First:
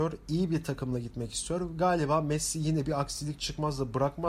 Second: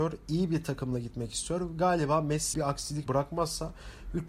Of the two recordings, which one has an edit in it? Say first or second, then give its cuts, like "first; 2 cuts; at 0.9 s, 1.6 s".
second; 2 cuts; at 2.5 s, 3.1 s